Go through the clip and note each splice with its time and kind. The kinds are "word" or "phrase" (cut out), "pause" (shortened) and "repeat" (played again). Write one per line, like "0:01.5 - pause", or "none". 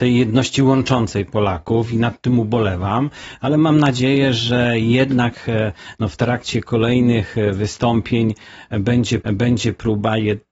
0:09.2 - repeat